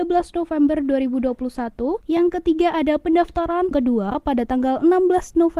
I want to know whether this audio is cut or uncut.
cut